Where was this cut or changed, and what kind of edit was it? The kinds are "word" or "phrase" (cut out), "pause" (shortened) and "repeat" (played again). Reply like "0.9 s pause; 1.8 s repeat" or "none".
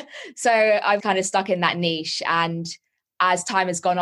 1.0 s word